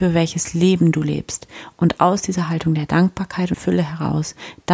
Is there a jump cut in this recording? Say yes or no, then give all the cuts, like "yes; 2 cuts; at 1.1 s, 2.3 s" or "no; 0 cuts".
yes; 1 cut; at 3.5 s